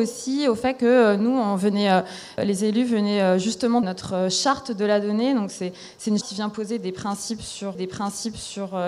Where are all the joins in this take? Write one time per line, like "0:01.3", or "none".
0:02.4
0:03.8
0:06.2
0:07.7